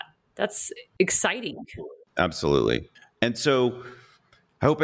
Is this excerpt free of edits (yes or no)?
no